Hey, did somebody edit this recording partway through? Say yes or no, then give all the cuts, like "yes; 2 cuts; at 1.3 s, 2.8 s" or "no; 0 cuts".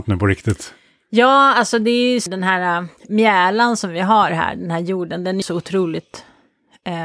yes; 3 cuts; at 2.3 s, 3.0 s, 5.4 s